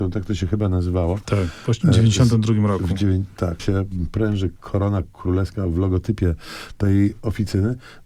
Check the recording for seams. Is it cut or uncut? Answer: cut